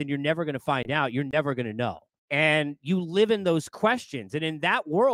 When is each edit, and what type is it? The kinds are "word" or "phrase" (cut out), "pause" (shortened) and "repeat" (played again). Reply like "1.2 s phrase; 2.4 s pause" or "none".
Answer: 2.2 s pause